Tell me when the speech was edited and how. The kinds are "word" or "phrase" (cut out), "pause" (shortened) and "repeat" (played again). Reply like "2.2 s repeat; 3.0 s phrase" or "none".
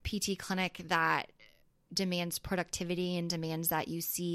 none

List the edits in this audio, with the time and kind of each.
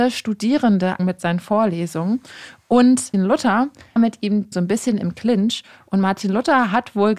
1.0 s word; 3.1 s word; 4.0 s word; 4.5 s word

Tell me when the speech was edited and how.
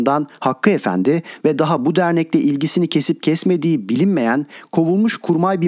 none

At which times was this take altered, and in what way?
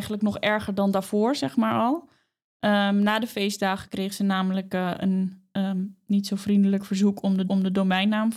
7.5 s repeat

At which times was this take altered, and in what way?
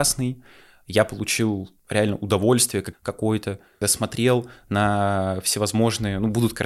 1.8 s pause; 2.9 s word; 3.8 s word

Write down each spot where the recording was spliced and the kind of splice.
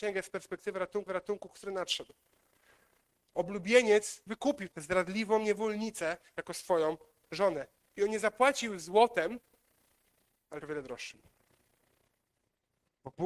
1.1 s repeat; 4.3 s word; 4.7 s word; 7.8 s pause; 10.6 s word

